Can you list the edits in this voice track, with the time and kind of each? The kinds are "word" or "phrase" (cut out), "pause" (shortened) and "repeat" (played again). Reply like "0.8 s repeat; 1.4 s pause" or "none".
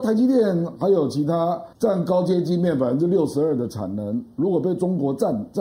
1.7 s pause